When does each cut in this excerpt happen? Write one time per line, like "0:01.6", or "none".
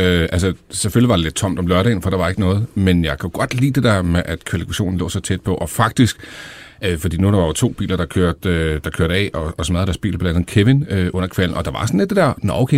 none